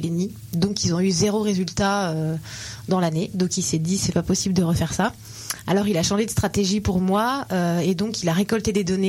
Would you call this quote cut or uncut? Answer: uncut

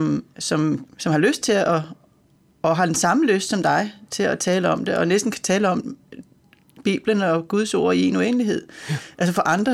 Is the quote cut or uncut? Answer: uncut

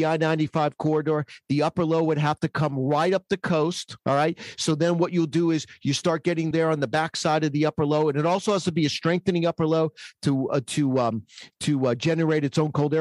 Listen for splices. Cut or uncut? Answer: cut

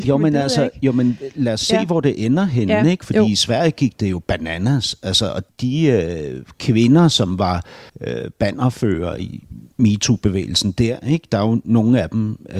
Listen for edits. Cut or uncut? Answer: cut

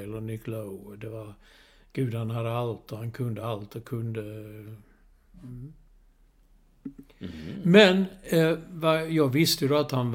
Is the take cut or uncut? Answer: uncut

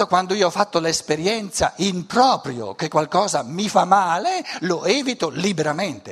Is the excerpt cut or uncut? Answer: uncut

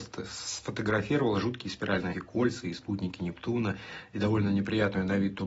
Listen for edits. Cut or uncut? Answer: cut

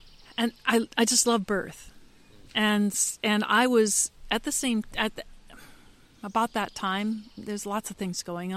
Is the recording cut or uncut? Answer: uncut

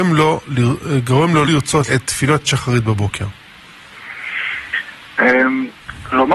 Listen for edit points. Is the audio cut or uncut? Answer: cut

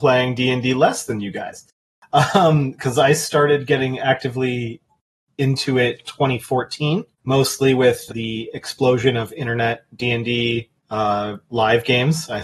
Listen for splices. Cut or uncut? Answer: cut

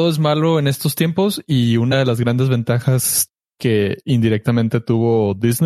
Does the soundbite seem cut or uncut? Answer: uncut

